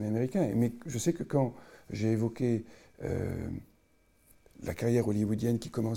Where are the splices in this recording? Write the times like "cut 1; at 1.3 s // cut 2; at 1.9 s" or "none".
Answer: none